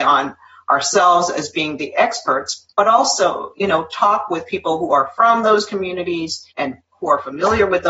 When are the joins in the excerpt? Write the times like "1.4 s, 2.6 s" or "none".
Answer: 2.7 s, 6.5 s